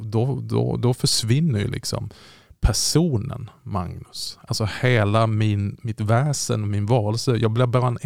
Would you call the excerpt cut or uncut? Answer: uncut